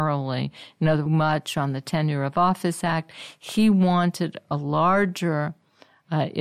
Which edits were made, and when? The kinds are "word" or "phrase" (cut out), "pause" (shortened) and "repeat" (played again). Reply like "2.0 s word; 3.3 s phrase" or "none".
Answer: 1.1 s phrase